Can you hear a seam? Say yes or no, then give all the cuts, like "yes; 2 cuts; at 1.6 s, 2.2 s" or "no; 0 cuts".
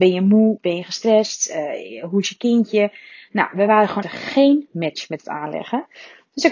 yes; 1 cut; at 4.0 s